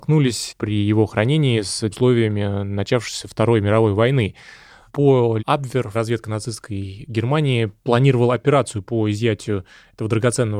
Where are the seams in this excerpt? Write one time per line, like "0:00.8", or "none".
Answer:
0:01.9
0:05.4
0:05.9